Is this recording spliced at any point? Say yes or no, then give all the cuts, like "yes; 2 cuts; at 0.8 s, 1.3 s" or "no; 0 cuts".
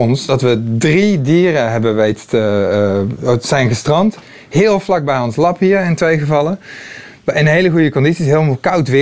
no; 0 cuts